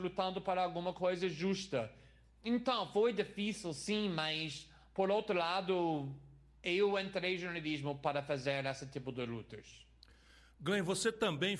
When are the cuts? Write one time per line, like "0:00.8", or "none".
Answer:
none